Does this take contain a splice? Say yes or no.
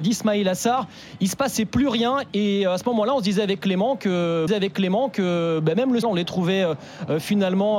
yes